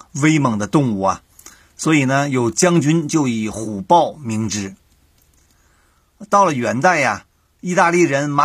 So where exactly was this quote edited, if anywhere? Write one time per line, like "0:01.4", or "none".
none